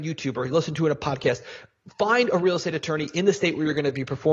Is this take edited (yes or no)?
no